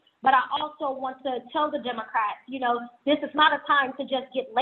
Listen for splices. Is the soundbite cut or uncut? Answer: uncut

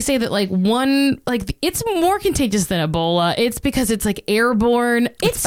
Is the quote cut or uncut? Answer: uncut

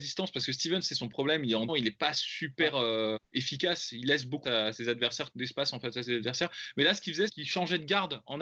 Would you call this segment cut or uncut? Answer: cut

